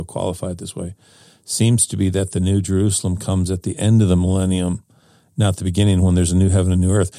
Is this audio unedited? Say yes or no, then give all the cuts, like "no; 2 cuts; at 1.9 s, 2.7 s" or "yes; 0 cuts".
yes; 0 cuts